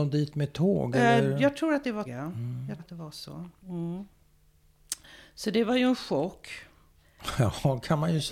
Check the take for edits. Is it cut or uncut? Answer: cut